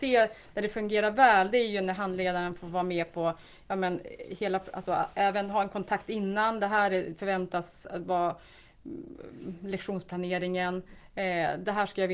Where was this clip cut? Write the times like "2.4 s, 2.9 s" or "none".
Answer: none